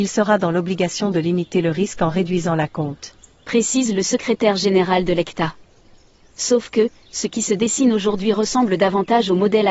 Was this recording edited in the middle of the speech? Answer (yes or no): no